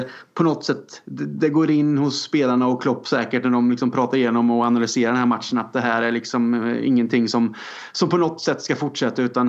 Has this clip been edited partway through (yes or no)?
no